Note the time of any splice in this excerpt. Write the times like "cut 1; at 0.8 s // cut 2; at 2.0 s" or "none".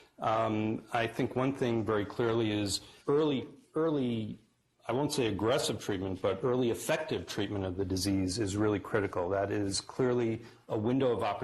cut 1; at 3.0 s